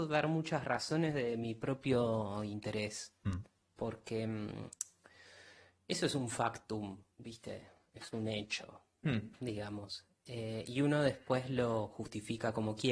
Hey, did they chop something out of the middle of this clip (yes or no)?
no